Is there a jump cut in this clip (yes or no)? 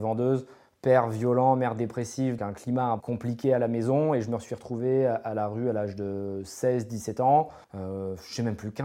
yes